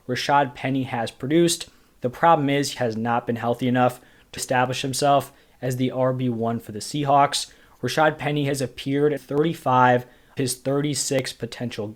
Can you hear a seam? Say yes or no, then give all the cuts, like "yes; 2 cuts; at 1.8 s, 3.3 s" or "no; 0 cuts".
yes; 4 cuts; at 2.8 s, 4.4 s, 9.2 s, 10.4 s